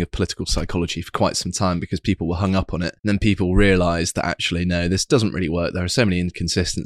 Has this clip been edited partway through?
yes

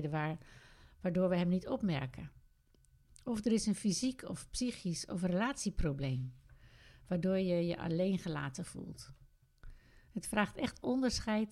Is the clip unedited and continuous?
yes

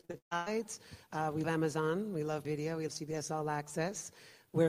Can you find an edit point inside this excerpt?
yes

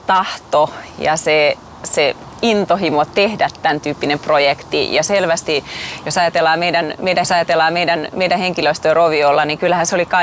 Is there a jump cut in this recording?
yes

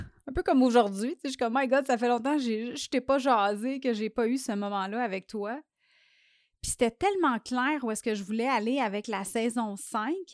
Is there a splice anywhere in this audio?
no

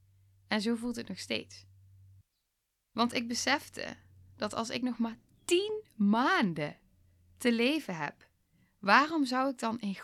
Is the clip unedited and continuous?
yes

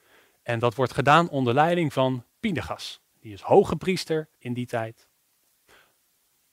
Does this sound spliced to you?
yes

